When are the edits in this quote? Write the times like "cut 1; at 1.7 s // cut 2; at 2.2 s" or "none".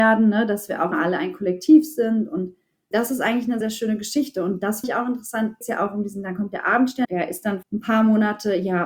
cut 1; at 0.9 s // cut 2; at 2.9 s // cut 3; at 3.6 s // cut 4; at 4.8 s // cut 5; at 5.6 s // cut 6; at 7.0 s // cut 7; at 7.6 s